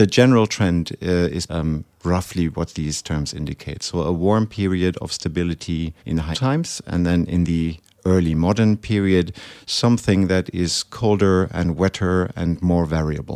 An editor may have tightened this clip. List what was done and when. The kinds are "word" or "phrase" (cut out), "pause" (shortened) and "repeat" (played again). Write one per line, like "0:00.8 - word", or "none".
0:01.5 - word
0:06.0 - pause
0:06.3 - word